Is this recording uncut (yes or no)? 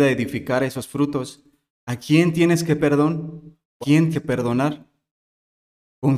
no